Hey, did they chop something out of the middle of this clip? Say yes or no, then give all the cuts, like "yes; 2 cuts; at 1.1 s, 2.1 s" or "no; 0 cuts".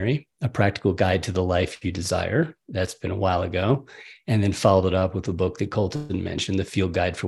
no; 0 cuts